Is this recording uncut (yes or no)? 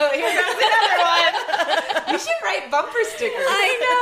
yes